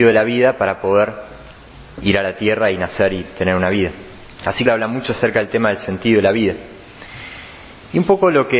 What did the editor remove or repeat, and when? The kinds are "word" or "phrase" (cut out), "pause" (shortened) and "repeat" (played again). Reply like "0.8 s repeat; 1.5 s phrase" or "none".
4.4 s pause; 4.7 s phrase